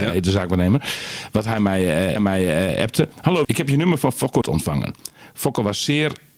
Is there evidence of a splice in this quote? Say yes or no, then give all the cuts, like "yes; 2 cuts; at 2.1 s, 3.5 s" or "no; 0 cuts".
yes; 3 cuts; at 2.2 s, 3.4 s, 4.4 s